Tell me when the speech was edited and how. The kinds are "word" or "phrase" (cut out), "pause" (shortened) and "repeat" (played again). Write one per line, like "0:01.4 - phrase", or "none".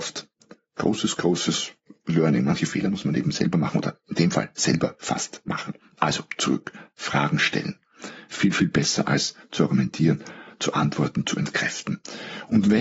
none